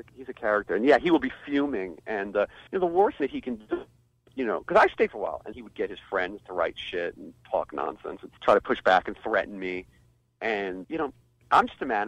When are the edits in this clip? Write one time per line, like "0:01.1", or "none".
0:02.7
0:03.2
0:05.1
0:05.5
0:08.4
0:10.8